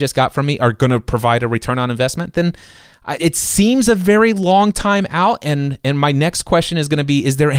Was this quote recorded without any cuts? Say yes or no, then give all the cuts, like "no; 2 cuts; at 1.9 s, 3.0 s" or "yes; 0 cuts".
no; 1 cut; at 3.2 s